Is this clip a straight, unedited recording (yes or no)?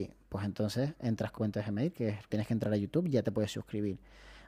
no